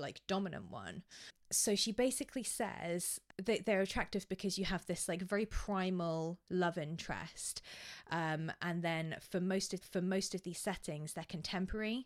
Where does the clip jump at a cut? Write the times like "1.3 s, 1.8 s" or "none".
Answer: 9.8 s